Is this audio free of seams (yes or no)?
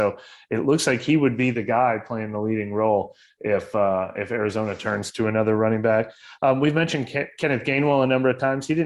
yes